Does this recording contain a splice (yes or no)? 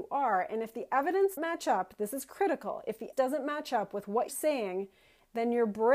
yes